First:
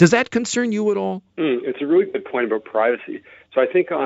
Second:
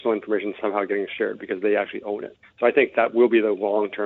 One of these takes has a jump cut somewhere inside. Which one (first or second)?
first